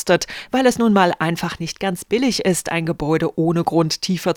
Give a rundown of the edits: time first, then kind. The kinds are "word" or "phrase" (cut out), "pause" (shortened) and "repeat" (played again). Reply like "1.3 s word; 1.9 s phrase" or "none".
none